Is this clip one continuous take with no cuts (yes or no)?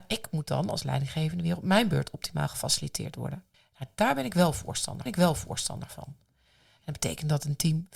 no